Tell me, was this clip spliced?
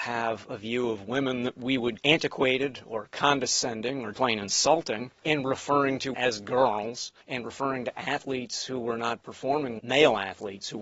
yes; 6 cuts; at 2.0 s, 4.1 s, 5.2 s, 6.1 s, 7.2 s, 9.8 s

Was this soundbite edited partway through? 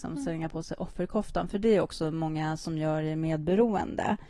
no; 0 cuts

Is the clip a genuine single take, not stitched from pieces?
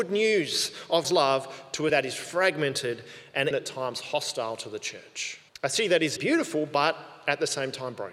no; 5 cuts; at 1.0 s, 1.9 s, 3.5 s, 5.5 s, 6.2 s

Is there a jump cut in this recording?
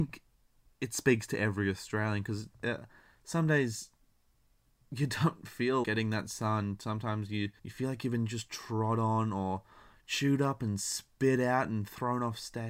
yes; 2 cuts; at 5.8 s, 7.6 s

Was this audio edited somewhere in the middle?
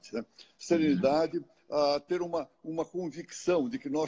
no; 0 cuts

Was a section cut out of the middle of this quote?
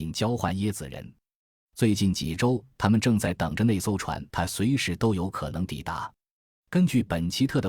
yes; 1 cut; at 4.3 s

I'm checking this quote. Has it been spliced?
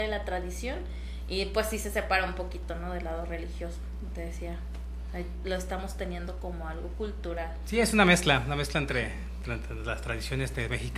no; 0 cuts

